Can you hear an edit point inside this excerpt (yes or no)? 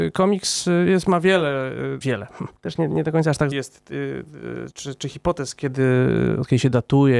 yes